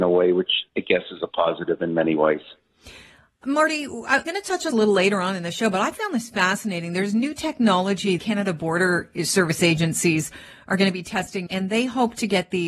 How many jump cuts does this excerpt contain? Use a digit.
4